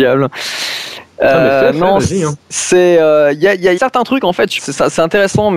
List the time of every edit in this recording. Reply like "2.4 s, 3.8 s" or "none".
2.4 s, 3.8 s, 4.6 s